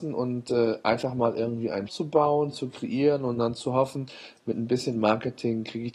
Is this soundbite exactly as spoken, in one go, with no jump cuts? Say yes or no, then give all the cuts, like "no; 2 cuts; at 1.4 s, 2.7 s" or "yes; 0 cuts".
no; 1 cut; at 1.9 s